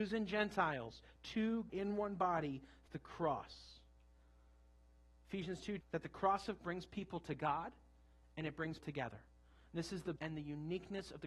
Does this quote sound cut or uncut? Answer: cut